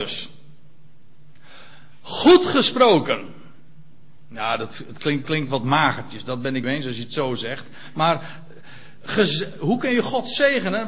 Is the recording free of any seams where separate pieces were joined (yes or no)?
no